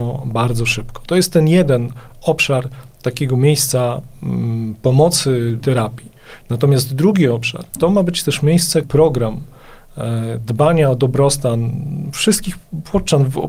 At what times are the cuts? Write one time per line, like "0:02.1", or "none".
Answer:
0:05.6
0:07.7
0:08.8